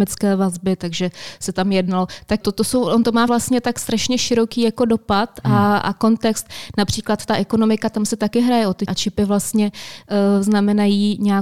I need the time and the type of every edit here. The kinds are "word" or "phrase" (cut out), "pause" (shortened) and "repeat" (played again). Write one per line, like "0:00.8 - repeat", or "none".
0:02.4 - word
0:03.3 - word
0:05.8 - word
0:08.9 - word